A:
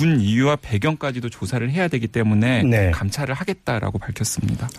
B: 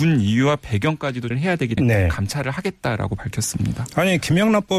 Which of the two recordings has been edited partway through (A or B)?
B